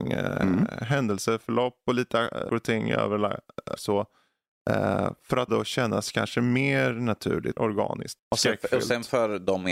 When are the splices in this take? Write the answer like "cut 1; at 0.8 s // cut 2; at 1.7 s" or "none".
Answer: cut 1; at 2.5 s // cut 2; at 3.8 s // cut 3; at 5.5 s // cut 4; at 7.6 s // cut 5; at 8.2 s

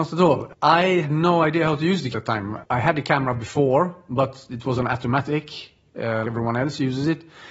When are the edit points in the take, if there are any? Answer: cut 1; at 1.0 s // cut 2; at 2.1 s // cut 3; at 4.7 s // cut 4; at 6.2 s

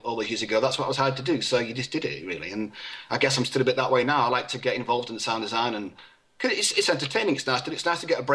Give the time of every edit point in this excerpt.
none

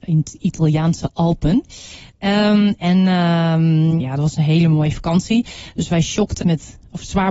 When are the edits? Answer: cut 1; at 4.0 s // cut 2; at 6.4 s

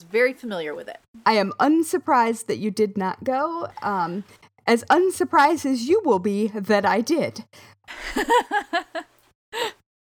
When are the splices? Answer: none

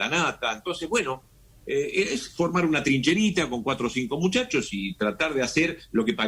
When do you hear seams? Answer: none

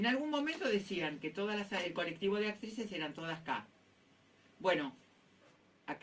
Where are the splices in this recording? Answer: none

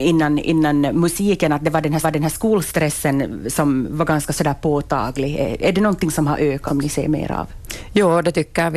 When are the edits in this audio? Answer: cut 1; at 2.0 s // cut 2; at 6.7 s

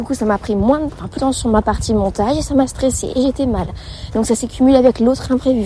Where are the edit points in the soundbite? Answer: cut 1; at 1.2 s

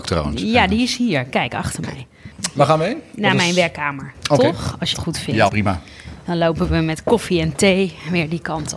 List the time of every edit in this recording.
cut 1; at 4.9 s // cut 2; at 5.5 s

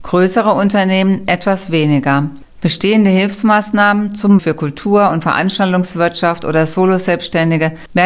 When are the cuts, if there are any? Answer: cut 1; at 4.4 s

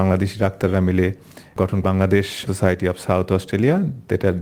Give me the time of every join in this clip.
cut 1; at 1.8 s // cut 2; at 2.5 s

